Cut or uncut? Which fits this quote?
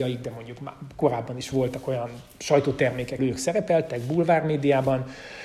cut